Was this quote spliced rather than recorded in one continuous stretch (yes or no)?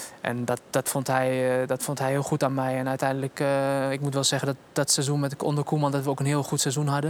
no